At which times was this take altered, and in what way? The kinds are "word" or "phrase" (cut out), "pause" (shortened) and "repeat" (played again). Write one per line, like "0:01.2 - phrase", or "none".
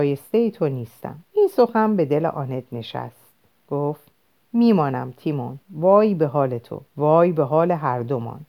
0:01.2 - pause
0:04.3 - pause
0:05.6 - pause
0:06.9 - pause